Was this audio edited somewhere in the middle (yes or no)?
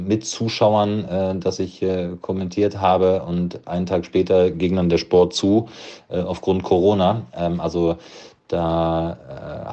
no